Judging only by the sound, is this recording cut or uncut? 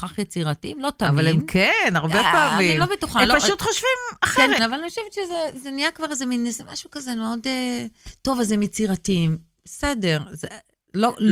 cut